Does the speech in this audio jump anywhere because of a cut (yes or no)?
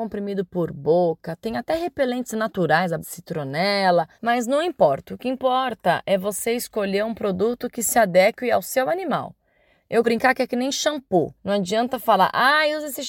yes